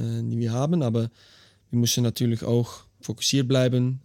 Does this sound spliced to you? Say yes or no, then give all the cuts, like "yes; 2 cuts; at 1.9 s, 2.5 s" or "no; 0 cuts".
no; 0 cuts